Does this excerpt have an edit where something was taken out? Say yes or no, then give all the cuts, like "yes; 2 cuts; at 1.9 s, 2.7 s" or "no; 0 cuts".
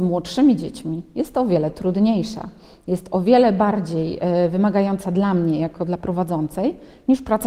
no; 0 cuts